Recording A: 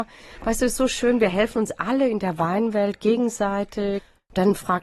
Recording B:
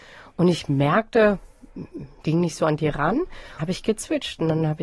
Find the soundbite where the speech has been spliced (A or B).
B